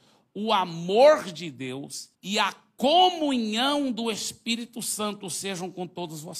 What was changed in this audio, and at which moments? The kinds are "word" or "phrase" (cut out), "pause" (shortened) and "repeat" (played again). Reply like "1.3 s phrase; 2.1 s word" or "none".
2.1 s pause